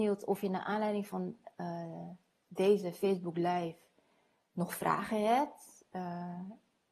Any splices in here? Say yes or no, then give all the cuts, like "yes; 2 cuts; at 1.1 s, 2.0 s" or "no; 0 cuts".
no; 0 cuts